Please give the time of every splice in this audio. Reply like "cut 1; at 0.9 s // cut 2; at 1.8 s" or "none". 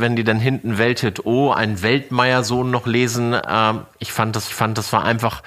cut 1; at 4.5 s

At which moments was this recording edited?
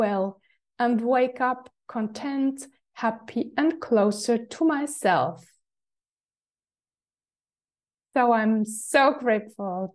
none

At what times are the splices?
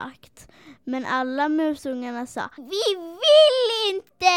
cut 1; at 2.6 s

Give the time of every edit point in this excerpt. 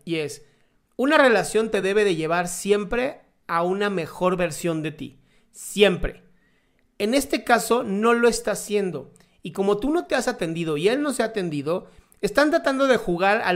none

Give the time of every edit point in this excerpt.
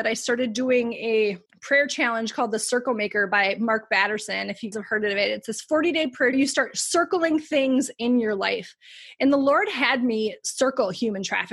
cut 1; at 1.5 s // cut 2; at 4.7 s // cut 3; at 6.3 s

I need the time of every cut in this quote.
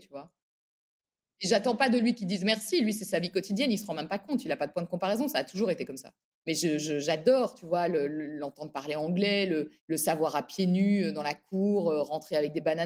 cut 1; at 6.3 s // cut 2; at 9.8 s

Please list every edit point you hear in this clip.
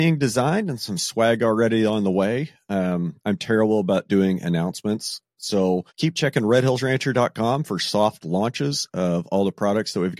cut 1; at 5.9 s

